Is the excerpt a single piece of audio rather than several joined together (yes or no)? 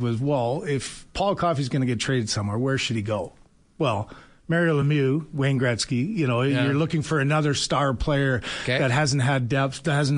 yes